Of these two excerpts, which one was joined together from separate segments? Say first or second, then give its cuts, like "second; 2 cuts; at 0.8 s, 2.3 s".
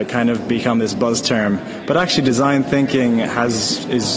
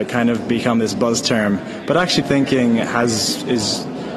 second; 1 cut; at 2.2 s